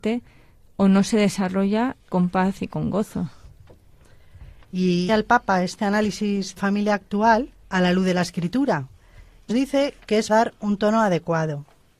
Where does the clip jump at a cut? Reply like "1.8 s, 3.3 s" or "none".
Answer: 2.0 s, 5.1 s, 6.6 s, 7.6 s, 9.5 s, 10.3 s